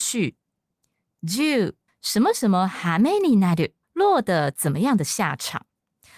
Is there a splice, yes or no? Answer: yes